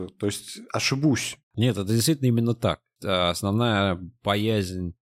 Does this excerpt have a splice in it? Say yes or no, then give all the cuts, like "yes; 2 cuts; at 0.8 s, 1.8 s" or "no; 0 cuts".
yes; 1 cut; at 1.4 s